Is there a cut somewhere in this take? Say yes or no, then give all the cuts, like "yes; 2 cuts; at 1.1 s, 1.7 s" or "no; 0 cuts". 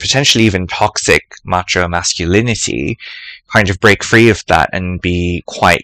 no; 0 cuts